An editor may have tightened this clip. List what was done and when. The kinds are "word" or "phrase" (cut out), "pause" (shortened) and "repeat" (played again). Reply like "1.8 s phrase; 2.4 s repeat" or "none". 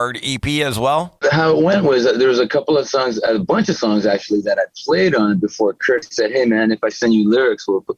6.0 s word